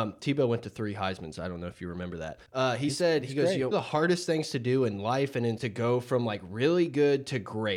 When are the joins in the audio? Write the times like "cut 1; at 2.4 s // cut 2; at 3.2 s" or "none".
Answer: cut 1; at 2.5 s // cut 2; at 3.7 s // cut 3; at 5.6 s